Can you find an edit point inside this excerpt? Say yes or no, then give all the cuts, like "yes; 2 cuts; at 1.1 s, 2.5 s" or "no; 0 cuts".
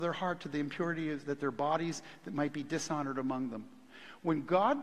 no; 0 cuts